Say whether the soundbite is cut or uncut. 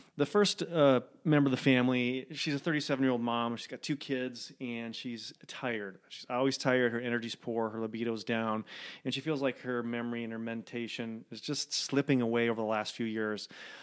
uncut